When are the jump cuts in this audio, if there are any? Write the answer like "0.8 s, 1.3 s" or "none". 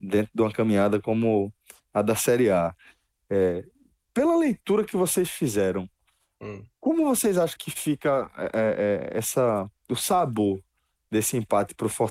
7.6 s